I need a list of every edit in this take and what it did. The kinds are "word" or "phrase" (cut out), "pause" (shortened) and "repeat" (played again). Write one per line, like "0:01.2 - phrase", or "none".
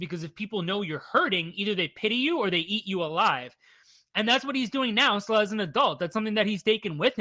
none